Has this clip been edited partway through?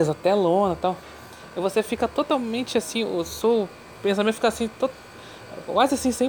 no; 0 cuts

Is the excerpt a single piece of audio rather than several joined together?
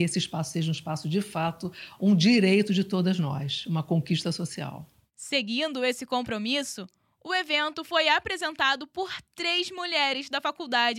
yes; 0 cuts

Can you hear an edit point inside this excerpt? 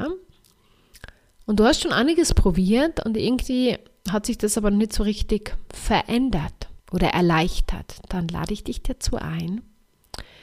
yes; 1 cut; at 6.8 s

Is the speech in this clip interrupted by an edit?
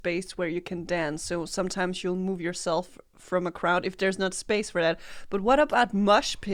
no; 0 cuts

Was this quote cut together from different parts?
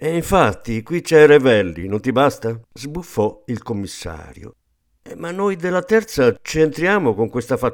yes; 1 cut; at 2.6 s

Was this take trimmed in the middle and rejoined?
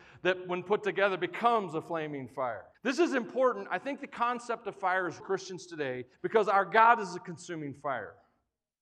yes; 3 cuts; at 2.7 s, 5.2 s, 6.1 s

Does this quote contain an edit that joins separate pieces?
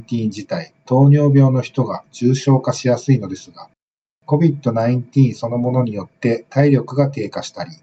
no; 0 cuts

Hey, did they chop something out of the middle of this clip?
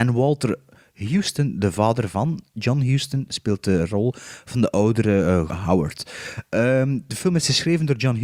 yes; 1 cut; at 5.5 s

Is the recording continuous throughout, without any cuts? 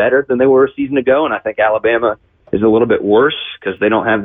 yes; 0 cuts

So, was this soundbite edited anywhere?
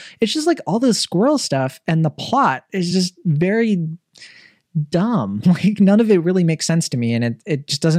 no; 0 cuts

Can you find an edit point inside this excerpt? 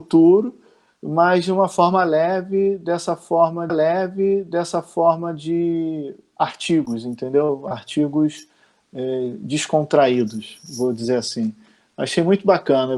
yes; 1 cut; at 3.7 s

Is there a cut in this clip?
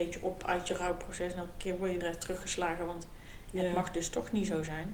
yes; 1 cut; at 2.0 s

